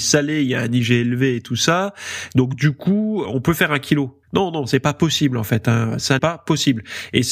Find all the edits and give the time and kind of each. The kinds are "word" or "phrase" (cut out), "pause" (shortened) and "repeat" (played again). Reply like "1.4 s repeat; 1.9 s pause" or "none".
3.2 s word; 4.2 s pause; 6.2 s word